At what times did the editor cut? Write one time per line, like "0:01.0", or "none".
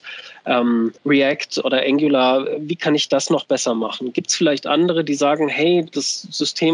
0:01.0

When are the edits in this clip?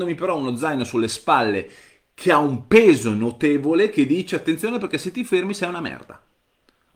none

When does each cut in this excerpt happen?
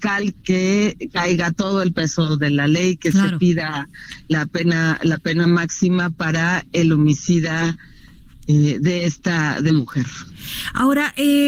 0:09.7

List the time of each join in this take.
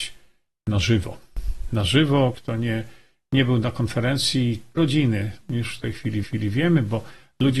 0:02.3
0:04.8
0:06.2

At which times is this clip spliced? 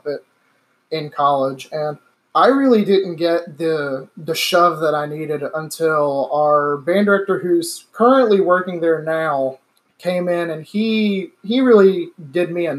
0:02.1
0:09.7

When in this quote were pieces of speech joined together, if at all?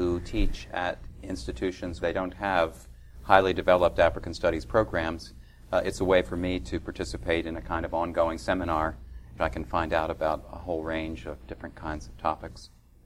0:02.0
0:09.4

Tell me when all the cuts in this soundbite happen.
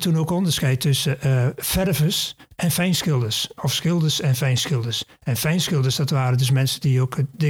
none

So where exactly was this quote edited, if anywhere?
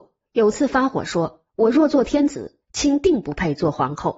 none

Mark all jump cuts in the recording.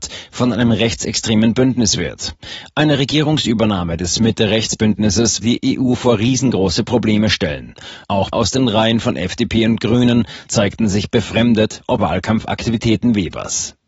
0:05.4
0:08.3
0:12.0

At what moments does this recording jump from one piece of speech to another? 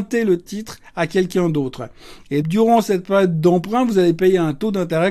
0:02.4

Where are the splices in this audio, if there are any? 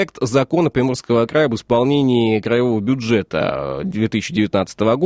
none

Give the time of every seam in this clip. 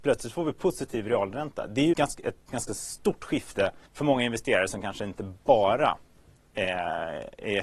0:01.9
0:02.4
0:03.9

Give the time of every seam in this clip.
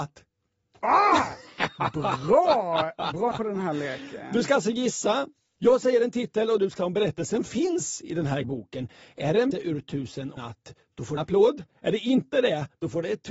0:03.3
0:06.8
0:08.4
0:09.5
0:10.4
0:11.2

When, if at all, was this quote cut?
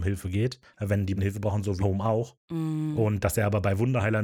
0:01.2
0:01.8

